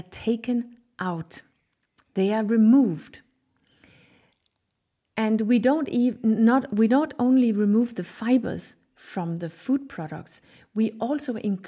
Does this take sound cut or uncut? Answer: uncut